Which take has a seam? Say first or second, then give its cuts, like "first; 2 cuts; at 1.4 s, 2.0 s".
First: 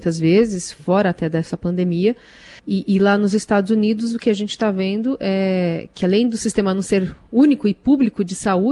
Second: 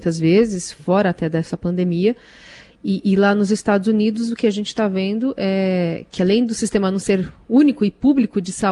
first; 1 cut; at 2.6 s